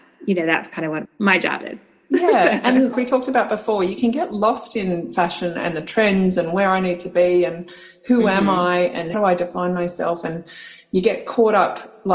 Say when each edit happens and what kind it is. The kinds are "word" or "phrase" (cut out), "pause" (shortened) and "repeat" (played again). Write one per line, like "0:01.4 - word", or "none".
0:01.0 - word
0:02.9 - word
0:09.1 - word

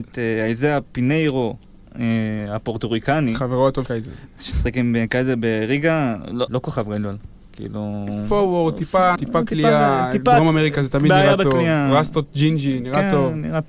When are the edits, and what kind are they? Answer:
0:03.9 - word
0:06.5 - word
0:09.2 - word

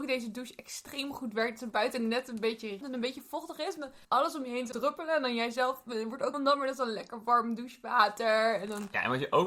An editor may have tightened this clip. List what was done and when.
0:02.8 - word
0:04.0 - pause
0:04.7 - word
0:06.3 - word

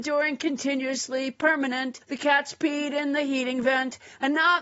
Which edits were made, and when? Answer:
0:02.0 - pause

